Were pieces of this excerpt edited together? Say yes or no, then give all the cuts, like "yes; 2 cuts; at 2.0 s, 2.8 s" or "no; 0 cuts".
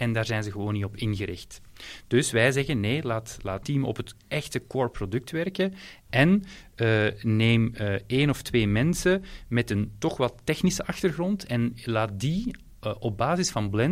yes; 1 cut; at 3.6 s